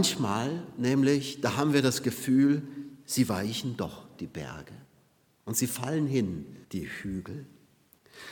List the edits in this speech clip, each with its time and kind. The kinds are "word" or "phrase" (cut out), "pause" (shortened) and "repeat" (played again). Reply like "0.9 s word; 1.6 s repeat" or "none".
6.6 s pause